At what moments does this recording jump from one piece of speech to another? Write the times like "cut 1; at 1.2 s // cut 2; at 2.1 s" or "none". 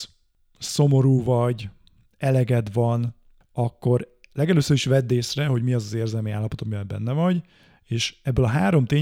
none